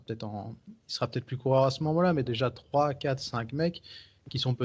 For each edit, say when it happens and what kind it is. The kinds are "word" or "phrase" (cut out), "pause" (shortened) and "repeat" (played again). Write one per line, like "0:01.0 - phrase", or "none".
0:02.3 - phrase